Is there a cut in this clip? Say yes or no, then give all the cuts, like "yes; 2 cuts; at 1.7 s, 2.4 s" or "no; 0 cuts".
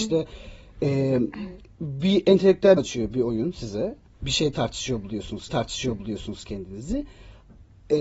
yes; 2 cuts; at 2.8 s, 5.5 s